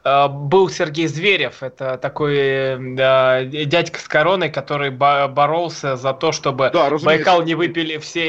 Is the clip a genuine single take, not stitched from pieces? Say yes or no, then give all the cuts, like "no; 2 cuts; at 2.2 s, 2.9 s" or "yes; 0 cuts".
yes; 0 cuts